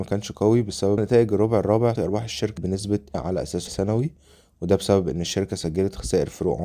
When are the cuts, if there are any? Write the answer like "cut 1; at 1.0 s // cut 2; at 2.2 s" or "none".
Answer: cut 1; at 1.0 s // cut 2; at 2.0 s // cut 3; at 2.6 s // cut 4; at 3.1 s // cut 5; at 3.7 s